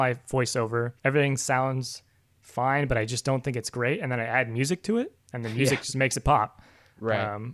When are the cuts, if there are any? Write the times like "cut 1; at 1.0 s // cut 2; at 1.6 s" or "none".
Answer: cut 1; at 1.0 s